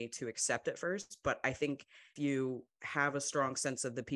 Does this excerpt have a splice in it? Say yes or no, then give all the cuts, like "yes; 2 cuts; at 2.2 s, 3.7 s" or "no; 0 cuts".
yes; 1 cut; at 2.2 s